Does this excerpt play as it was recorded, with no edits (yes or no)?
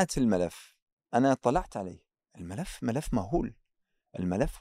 yes